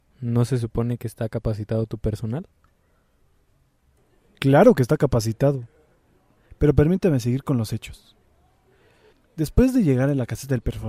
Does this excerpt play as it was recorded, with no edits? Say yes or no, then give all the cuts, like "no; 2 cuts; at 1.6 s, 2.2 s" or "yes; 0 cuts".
yes; 0 cuts